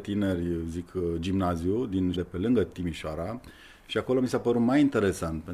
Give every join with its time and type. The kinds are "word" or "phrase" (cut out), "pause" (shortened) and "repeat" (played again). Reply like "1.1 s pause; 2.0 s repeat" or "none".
2.1 s word